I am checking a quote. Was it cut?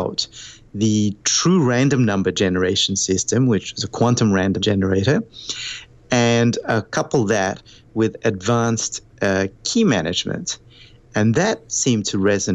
yes; 1 cut; at 4.6 s

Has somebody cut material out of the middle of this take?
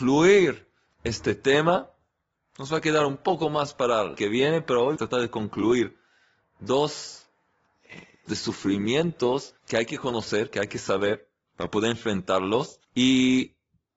yes; 6 cuts; at 4.1 s, 5.0 s, 8.3 s, 9.6 s, 11.5 s, 12.8 s

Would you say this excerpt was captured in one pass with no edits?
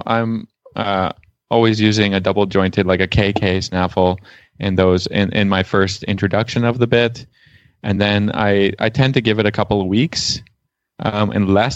yes; 0 cuts

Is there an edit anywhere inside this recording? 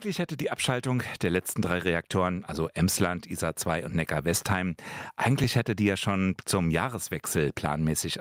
no; 0 cuts

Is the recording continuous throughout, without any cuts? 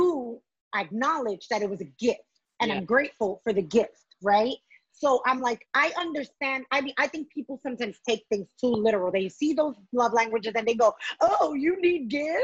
yes; 0 cuts

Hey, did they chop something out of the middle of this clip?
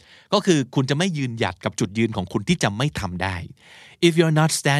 no; 0 cuts

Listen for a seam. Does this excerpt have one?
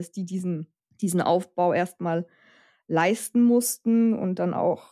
yes; 1 cut; at 0.9 s

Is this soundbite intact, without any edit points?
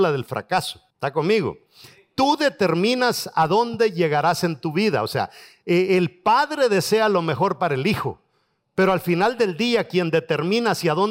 no; 1 cut; at 0.9 s

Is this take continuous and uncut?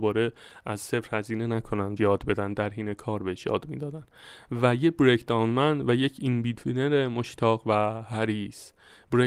no; 1 cut; at 2.0 s

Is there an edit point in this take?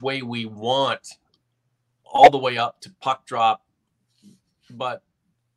no; 0 cuts

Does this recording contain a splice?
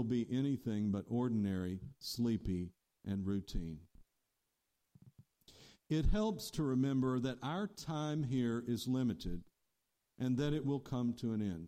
no; 0 cuts

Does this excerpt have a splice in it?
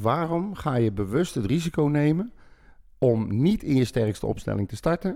no; 0 cuts

